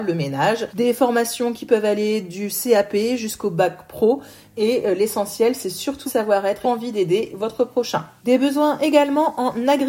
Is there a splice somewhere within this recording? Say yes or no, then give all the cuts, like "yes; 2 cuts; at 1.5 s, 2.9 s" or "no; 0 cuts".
yes; 2 cuts; at 6.1 s, 6.6 s